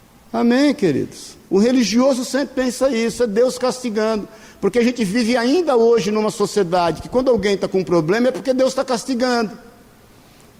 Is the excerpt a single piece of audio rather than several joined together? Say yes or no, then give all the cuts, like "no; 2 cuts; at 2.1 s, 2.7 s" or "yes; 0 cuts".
yes; 0 cuts